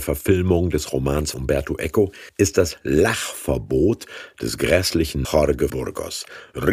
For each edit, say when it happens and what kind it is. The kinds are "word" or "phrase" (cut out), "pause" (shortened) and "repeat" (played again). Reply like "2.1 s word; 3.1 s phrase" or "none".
1.3 s word; 2.3 s pause; 5.2 s word; 5.7 s word